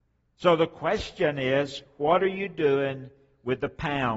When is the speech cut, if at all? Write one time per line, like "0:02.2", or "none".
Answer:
none